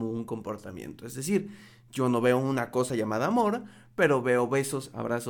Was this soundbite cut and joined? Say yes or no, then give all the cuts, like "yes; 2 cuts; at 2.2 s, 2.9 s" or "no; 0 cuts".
no; 0 cuts